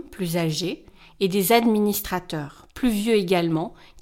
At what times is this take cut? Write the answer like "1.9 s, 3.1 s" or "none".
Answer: none